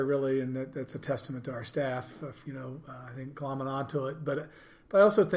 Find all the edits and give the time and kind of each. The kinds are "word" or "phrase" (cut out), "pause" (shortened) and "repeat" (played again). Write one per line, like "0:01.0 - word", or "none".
0:02.4 - word

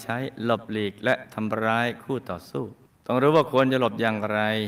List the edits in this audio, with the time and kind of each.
0:02.8 - pause

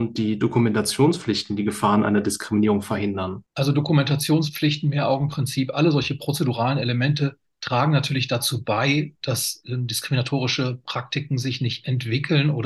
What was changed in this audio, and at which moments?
0:03.5 - pause

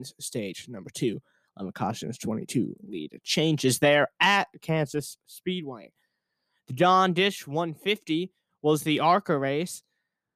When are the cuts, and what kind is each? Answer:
none

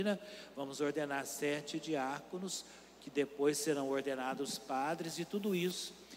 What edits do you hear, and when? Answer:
none

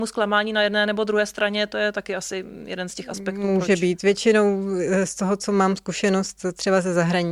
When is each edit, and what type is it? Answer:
none

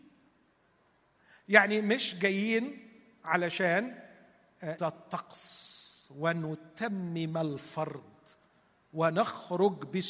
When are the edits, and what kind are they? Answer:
0:04.8 - word

